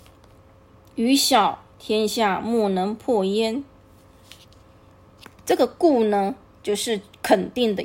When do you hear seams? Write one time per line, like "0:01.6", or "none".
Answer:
none